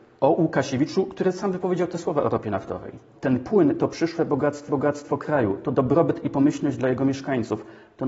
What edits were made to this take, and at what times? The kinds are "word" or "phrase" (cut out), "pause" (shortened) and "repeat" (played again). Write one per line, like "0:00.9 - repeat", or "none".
0:04.7 - repeat